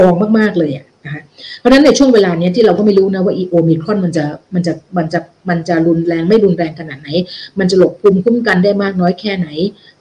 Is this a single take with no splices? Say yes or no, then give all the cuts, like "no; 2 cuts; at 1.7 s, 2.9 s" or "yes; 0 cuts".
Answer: yes; 0 cuts